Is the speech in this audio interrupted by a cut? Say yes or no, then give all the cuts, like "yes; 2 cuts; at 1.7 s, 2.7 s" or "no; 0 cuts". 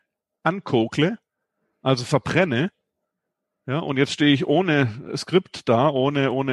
no; 0 cuts